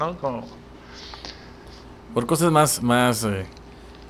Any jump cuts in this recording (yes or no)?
no